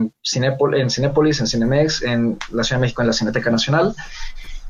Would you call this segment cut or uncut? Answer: uncut